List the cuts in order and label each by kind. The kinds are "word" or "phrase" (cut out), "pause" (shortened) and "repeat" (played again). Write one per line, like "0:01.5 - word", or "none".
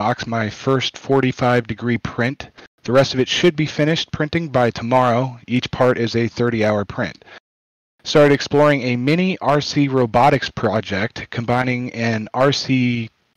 none